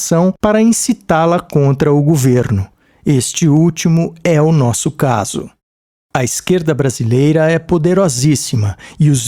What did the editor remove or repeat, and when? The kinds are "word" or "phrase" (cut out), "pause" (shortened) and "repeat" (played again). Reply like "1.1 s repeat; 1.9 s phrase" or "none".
none